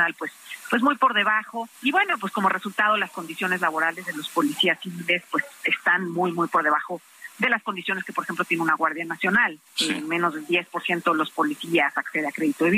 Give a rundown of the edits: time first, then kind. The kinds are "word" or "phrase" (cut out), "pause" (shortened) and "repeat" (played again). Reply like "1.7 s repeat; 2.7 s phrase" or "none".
1.7 s pause; 9.7 s pause